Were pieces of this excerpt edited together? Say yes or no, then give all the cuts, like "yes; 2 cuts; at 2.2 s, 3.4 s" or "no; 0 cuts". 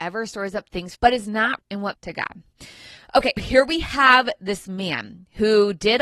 yes; 4 cuts; at 0.9 s, 1.6 s, 1.9 s, 3.4 s